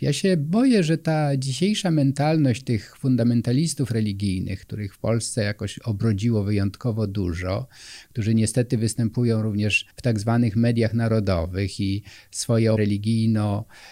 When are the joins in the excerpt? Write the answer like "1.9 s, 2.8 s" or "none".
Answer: 9.9 s, 12.8 s